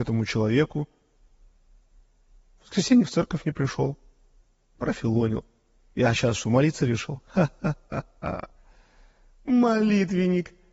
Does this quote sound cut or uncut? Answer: uncut